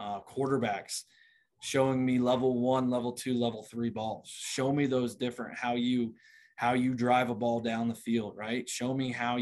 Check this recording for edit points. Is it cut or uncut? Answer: uncut